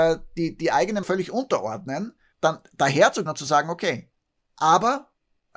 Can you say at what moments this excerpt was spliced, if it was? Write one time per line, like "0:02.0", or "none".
0:01.0
0:02.3
0:03.3